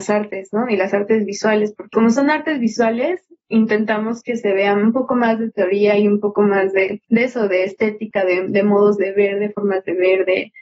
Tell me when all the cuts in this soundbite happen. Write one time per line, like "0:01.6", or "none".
0:01.9
0:07.0